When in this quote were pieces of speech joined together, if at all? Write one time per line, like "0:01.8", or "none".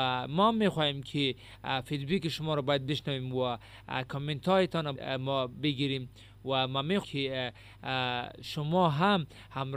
0:04.9
0:07.0